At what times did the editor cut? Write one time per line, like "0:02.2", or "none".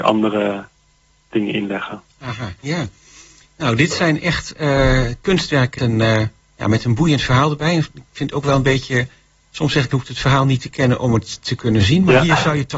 0:02.1
0:05.8
0:09.9